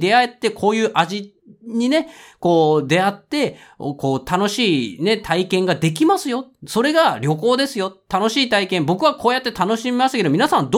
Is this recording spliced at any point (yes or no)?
no